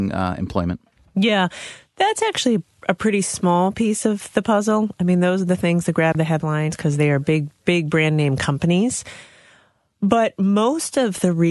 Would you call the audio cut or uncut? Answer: uncut